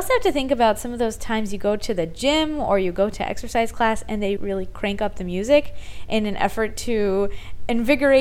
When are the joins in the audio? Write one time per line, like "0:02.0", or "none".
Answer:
0:04.4